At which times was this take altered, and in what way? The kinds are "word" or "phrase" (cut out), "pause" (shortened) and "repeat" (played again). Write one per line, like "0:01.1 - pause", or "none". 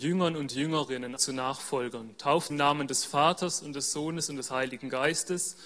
0:01.2 - word
0:02.5 - word